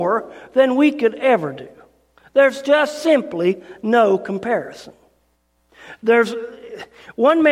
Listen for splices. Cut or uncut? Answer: uncut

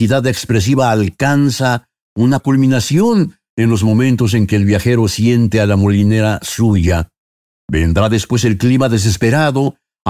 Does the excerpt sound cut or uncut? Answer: cut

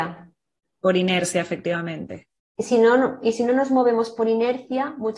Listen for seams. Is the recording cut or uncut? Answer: uncut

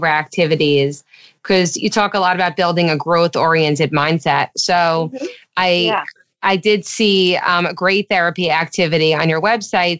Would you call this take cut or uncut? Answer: uncut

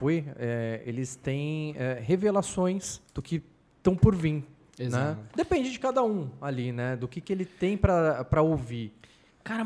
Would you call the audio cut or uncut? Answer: cut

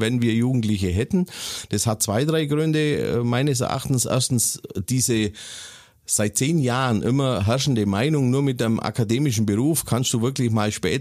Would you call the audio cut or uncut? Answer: uncut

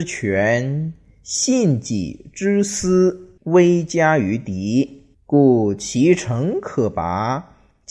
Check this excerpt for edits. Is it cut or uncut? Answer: cut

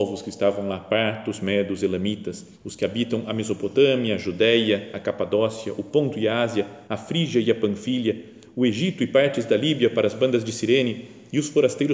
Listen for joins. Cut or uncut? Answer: cut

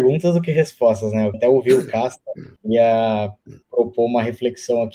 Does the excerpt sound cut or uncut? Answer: cut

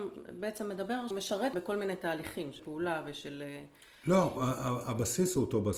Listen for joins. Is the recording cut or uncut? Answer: cut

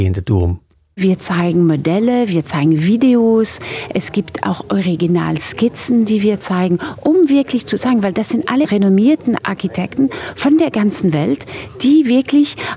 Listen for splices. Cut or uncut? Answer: uncut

